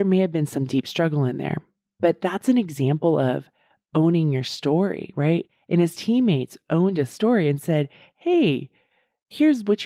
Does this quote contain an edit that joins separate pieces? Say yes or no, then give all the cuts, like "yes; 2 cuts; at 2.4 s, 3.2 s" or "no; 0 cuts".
no; 0 cuts